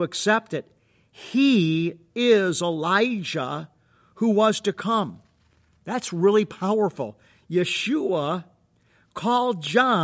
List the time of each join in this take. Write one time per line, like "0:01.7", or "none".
none